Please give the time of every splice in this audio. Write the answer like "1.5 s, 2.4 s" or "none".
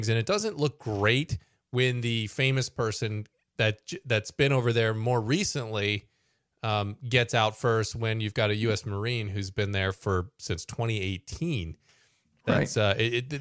none